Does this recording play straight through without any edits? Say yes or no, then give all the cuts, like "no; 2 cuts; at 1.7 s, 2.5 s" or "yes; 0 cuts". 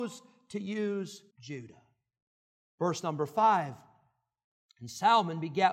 no; 1 cut; at 1.3 s